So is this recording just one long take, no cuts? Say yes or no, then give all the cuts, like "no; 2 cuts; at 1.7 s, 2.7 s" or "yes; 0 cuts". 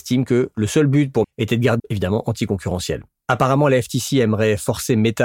no; 2 cuts; at 1.2 s, 1.8 s